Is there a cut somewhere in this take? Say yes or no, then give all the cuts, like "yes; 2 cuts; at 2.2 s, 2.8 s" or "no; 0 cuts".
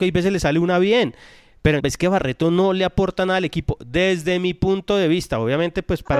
yes; 1 cut; at 1.8 s